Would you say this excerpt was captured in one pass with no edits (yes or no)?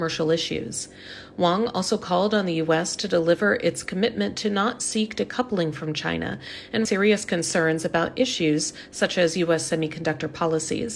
no